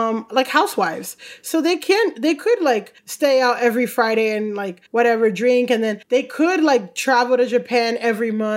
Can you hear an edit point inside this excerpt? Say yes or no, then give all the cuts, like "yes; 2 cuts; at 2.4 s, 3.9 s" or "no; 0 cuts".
yes; 3 cuts; at 3.0 s, 4.9 s, 6.0 s